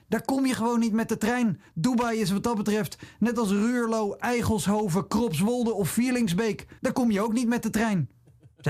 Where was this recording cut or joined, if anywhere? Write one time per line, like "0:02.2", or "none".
0:01.7
0:06.8